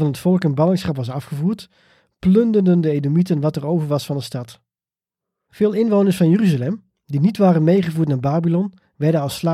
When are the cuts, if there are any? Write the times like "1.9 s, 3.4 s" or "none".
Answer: none